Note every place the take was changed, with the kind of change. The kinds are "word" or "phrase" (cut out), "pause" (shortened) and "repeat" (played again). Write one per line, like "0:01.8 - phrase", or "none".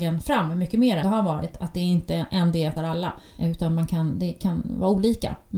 0:01.0 - word
0:02.8 - phrase